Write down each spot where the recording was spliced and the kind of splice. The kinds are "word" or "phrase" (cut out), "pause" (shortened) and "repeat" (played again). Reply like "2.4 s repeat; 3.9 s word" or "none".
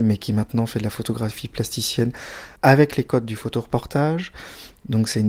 2.6 s pause